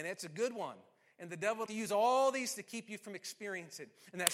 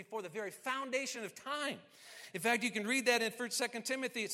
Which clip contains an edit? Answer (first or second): first